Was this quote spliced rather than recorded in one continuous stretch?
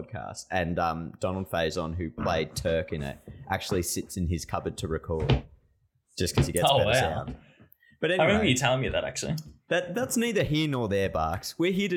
no; 0 cuts

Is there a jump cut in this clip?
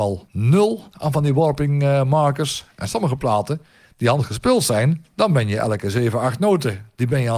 no; 0 cuts

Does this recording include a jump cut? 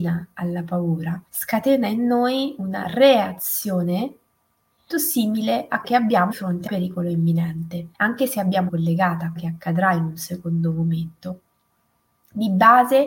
yes; 8 cuts; at 1.3 s, 4.9 s, 5.8 s, 6.3 s, 6.7 s, 7.9 s, 8.7 s, 9.4 s

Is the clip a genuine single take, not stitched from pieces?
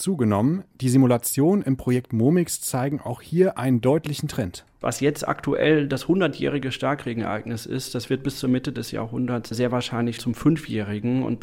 no; 1 cut; at 10.2 s

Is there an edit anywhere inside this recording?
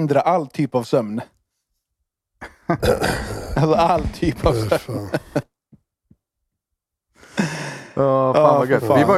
no; 0 cuts

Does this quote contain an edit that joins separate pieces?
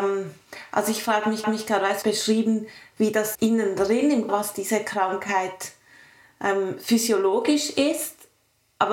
yes; 4 cuts; at 1.4 s, 2.0 s, 3.3 s, 4.3 s

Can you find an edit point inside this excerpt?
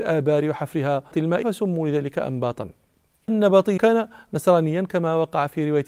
yes; 4 cuts; at 1.1 s, 1.4 s, 3.3 s, 3.8 s

